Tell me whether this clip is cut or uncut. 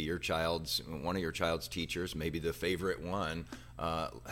uncut